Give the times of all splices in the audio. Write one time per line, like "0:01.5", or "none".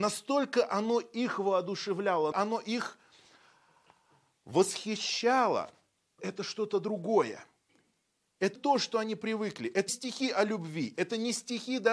0:02.3
0:06.2
0:08.6
0:09.9